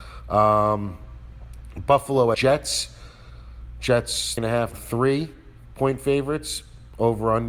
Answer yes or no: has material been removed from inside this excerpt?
yes